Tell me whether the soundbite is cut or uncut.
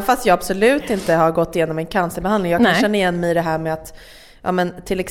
uncut